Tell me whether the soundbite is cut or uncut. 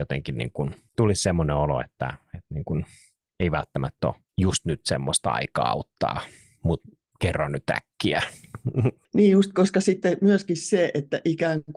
uncut